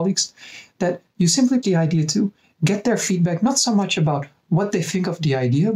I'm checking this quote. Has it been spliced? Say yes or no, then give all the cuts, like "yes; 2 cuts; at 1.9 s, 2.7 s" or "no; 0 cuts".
yes; 1 cut; at 1.6 s